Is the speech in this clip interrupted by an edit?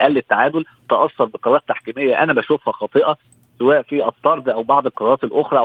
no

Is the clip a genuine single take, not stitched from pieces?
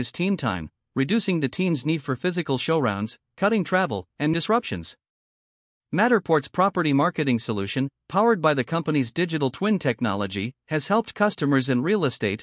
no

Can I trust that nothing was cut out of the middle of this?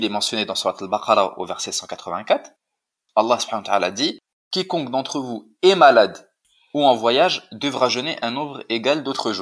yes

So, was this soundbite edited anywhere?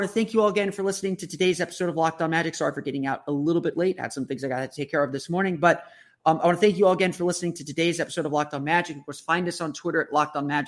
no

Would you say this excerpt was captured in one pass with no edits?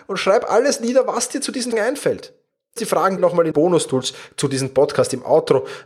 no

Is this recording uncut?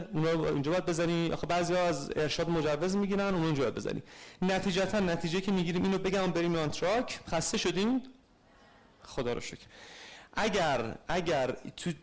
yes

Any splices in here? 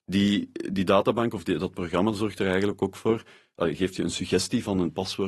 no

